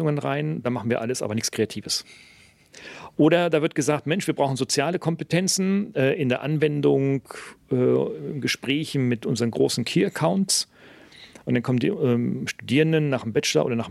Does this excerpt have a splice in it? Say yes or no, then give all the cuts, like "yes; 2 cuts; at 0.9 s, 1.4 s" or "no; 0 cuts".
no; 0 cuts